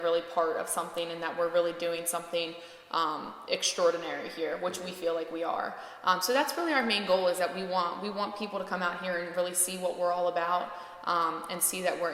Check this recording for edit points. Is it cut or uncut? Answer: uncut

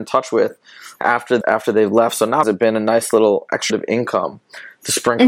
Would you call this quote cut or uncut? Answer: cut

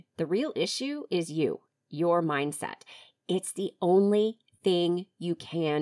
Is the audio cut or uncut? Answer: uncut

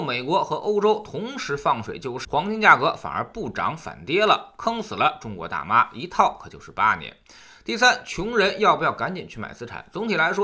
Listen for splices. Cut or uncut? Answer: cut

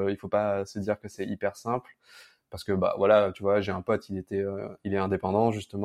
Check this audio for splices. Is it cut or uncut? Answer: uncut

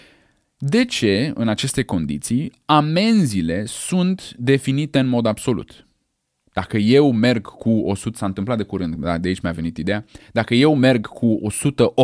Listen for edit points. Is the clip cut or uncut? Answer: uncut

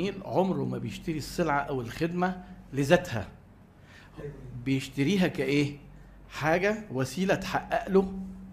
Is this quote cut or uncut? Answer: uncut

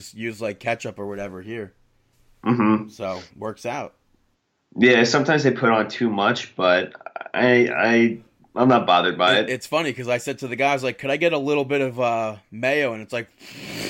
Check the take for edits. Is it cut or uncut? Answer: uncut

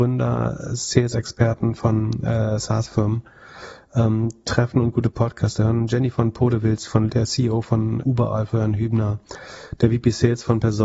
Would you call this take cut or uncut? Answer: cut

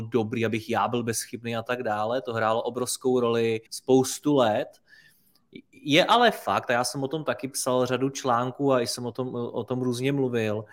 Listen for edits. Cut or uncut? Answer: cut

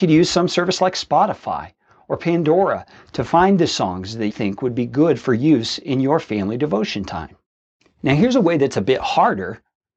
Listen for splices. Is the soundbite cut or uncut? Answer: cut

